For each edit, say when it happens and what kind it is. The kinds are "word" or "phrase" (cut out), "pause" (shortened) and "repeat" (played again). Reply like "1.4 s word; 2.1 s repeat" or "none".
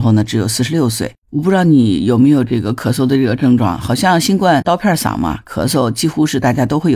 1.2 s pause